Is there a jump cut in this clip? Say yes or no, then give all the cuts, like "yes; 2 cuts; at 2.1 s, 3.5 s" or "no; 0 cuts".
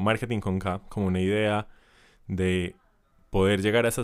no; 0 cuts